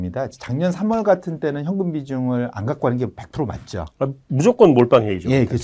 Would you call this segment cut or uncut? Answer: uncut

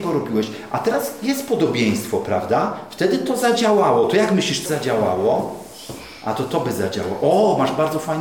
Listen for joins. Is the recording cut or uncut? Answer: cut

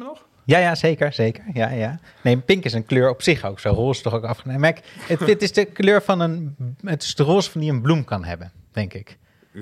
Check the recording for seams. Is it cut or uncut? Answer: uncut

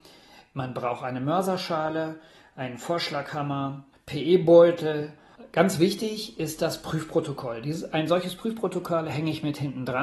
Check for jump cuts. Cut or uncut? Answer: uncut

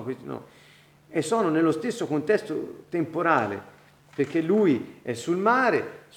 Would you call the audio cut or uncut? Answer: uncut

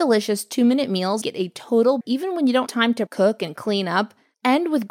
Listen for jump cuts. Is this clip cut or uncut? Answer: cut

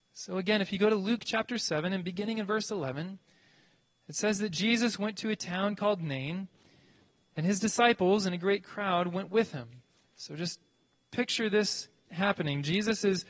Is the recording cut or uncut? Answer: cut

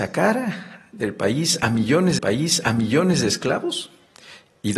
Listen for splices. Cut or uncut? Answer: cut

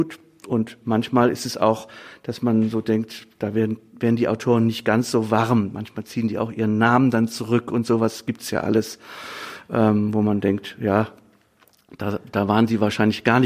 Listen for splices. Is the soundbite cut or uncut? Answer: uncut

